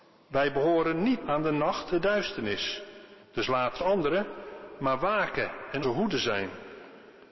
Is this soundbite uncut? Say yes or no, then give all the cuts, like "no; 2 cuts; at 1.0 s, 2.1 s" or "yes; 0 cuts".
no; 5 cuts; at 1.2 s, 1.9 s, 3.2 s, 3.8 s, 5.8 s